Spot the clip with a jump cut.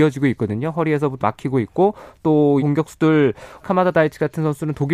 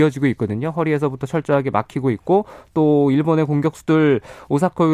first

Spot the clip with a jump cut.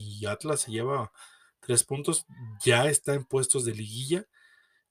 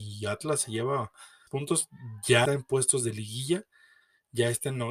second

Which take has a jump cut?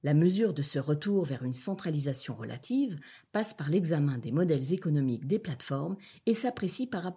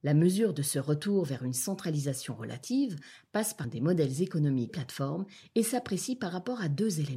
second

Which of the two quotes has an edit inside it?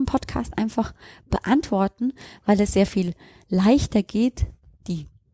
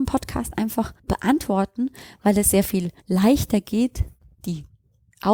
second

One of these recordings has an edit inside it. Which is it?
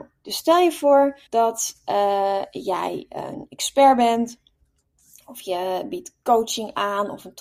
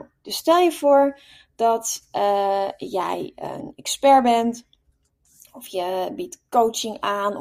first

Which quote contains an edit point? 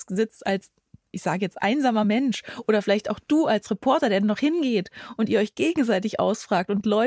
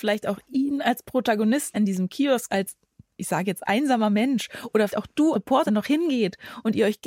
second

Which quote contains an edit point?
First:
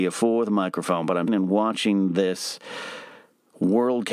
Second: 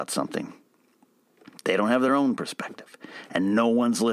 first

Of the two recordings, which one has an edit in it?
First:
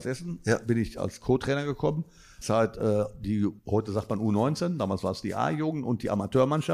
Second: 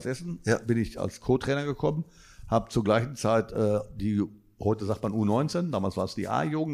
first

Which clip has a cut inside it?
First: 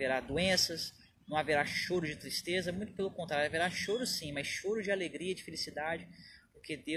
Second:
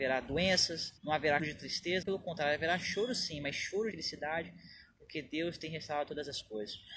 second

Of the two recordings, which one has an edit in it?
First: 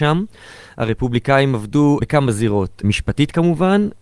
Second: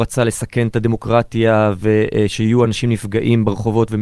first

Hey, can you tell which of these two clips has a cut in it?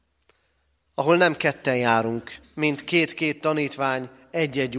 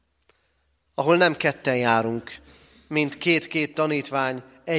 first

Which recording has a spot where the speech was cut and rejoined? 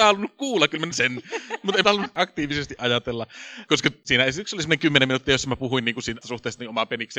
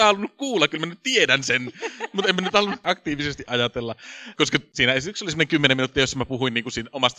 first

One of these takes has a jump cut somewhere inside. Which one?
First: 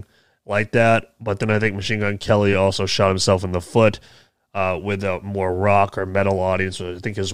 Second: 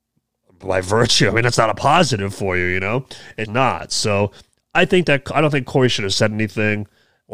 second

